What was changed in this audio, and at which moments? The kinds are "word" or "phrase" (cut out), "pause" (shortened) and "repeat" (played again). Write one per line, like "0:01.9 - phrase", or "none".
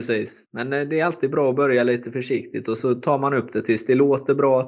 0:02.8 - word